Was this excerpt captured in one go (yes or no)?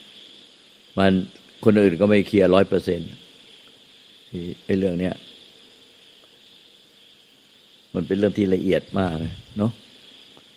yes